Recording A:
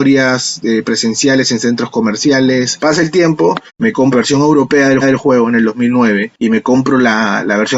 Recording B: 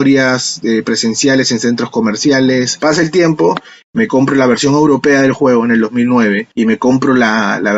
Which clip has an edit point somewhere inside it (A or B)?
A